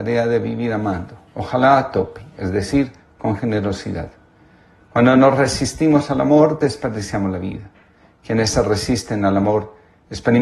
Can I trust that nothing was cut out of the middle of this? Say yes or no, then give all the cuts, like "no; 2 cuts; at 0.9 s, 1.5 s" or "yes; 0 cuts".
yes; 0 cuts